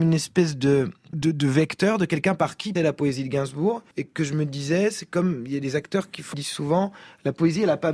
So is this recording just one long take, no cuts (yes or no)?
no